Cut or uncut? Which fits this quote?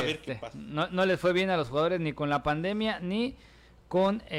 uncut